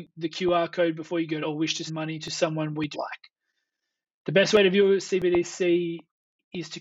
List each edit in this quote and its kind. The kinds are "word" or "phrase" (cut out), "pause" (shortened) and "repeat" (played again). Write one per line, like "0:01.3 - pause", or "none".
0:01.4 - phrase
0:01.9 - word
0:02.9 - word